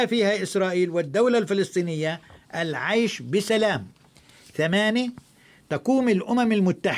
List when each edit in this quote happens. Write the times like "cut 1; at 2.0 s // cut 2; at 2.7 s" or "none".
none